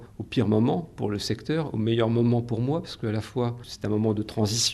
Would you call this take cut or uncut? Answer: uncut